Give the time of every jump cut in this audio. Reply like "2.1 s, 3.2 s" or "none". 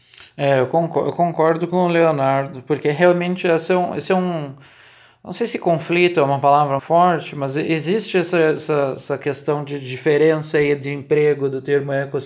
6.8 s